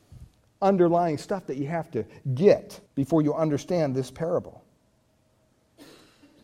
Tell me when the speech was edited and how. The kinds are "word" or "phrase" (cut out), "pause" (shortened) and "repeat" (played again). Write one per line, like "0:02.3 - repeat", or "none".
0:02.9 - pause

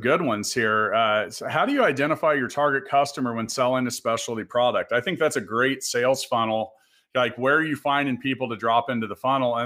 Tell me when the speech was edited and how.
none

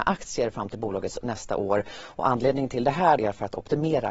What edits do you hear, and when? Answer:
0:01.2 - word
0:03.2 - word

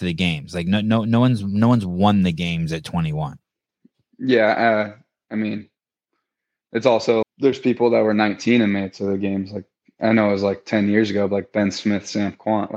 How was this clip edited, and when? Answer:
0:07.2 - word

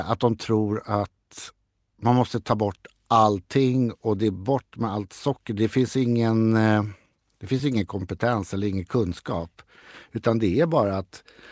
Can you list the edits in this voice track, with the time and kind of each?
none

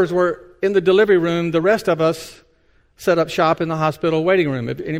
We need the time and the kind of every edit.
none

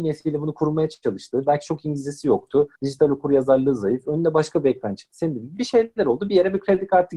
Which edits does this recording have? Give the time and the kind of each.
0:02.8 - pause

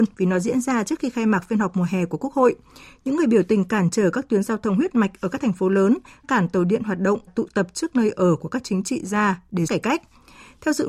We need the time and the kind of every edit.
0:06.2 - word
0:07.3 - word
0:09.7 - word

